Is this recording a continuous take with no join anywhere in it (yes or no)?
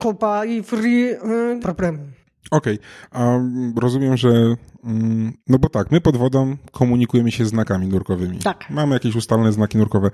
no